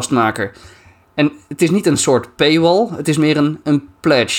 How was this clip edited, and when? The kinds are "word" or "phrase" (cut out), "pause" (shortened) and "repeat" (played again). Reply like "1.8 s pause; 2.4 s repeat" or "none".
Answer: none